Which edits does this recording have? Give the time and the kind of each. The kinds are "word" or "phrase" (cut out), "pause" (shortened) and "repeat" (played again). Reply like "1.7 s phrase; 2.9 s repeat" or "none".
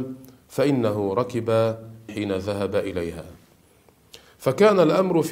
2.1 s word